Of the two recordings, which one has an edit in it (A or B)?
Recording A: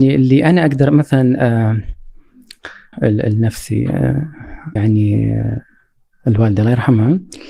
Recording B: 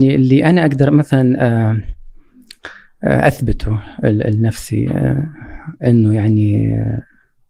A